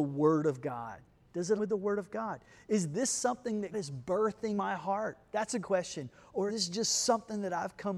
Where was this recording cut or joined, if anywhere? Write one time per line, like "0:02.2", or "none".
0:01.6
0:03.7
0:04.6
0:05.6
0:06.5